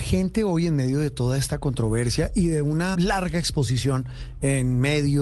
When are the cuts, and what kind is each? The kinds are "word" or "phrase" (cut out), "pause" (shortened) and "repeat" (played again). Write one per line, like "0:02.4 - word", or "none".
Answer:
0:02.9 - word